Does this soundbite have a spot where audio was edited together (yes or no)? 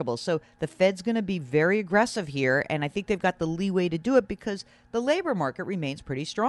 no